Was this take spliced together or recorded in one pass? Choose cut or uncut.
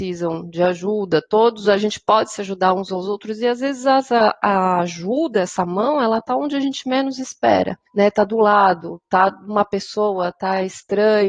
cut